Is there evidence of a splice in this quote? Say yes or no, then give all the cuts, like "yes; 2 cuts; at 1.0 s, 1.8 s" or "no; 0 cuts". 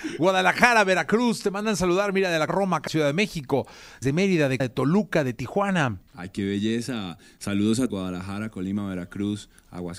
yes; 6 cuts; at 2.5 s, 2.9 s, 4.0 s, 4.6 s, 6.1 s, 7.9 s